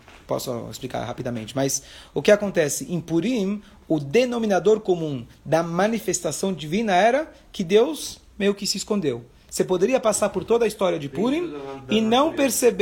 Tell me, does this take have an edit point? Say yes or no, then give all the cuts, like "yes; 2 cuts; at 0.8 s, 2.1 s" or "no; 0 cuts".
no; 0 cuts